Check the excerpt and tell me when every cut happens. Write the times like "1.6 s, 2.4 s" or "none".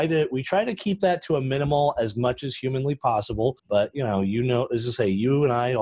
3.6 s